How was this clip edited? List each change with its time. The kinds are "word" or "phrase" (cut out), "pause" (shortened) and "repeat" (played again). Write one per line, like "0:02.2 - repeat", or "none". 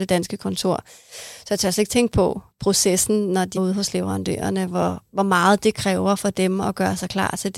0:02.5 - pause
0:03.6 - word